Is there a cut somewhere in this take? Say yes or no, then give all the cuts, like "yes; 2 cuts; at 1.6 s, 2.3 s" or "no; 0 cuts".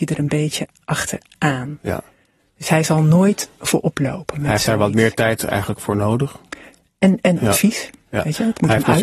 no; 0 cuts